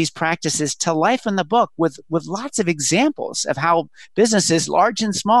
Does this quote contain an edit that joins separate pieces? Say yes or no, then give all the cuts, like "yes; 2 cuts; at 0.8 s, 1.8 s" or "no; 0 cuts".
no; 0 cuts